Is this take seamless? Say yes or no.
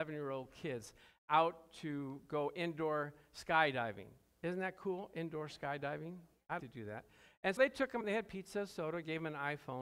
no